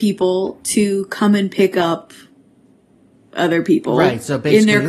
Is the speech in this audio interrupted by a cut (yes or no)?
no